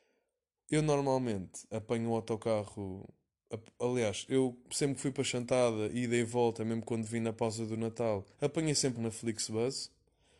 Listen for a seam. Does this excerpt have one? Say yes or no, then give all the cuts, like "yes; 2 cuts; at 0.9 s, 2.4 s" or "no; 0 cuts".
yes; 3 cuts; at 1.7 s, 8.3 s, 8.9 s